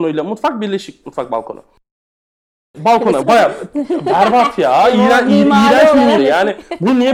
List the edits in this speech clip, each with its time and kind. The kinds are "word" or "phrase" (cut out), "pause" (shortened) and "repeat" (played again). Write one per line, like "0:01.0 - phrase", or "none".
0:03.2 - word
0:06.2 - word